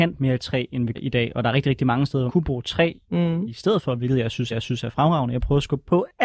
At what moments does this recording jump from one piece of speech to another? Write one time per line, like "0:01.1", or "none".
0:00.9
0:02.3
0:04.5